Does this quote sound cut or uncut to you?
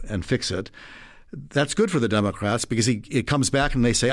uncut